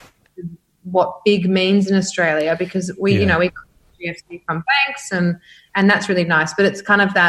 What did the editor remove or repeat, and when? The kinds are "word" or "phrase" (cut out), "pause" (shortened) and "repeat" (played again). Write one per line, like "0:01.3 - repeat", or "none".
none